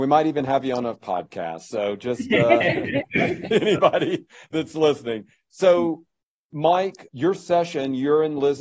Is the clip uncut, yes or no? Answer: no